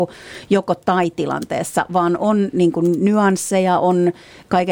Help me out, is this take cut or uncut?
uncut